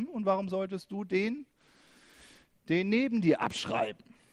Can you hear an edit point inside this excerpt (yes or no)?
no